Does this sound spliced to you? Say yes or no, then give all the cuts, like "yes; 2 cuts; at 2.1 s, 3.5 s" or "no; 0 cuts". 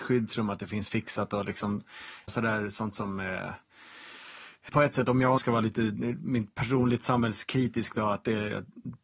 yes; 3 cuts; at 2.3 s, 4.7 s, 5.4 s